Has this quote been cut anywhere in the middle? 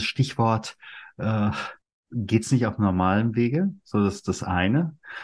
yes; 1 cut; at 1.8 s

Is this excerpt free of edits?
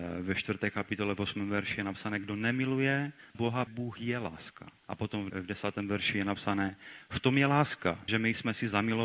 no; 5 cuts; at 3.3 s, 3.7 s, 4.8 s, 5.3 s, 8.1 s

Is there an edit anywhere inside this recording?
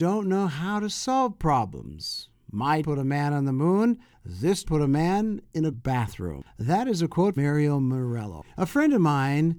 yes; 4 cuts; at 2.8 s, 4.6 s, 5.7 s, 7.4 s

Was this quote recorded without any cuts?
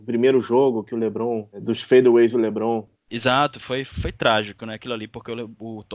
yes; 0 cuts

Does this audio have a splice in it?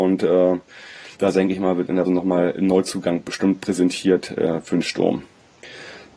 yes; 2 cuts; at 1.1 s, 2.0 s

